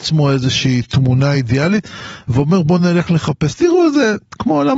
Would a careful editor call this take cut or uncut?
uncut